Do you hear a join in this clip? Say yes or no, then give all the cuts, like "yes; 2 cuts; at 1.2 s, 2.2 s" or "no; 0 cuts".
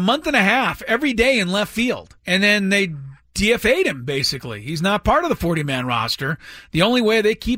yes; 1 cut; at 2.2 s